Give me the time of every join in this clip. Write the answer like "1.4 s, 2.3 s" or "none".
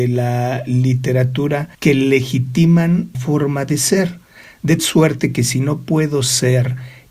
1.7 s, 3.1 s, 4.8 s